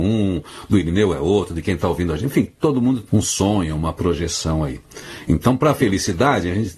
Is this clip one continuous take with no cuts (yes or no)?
no